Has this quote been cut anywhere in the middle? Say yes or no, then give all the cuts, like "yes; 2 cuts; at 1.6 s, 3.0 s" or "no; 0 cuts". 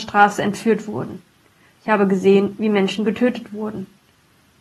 no; 0 cuts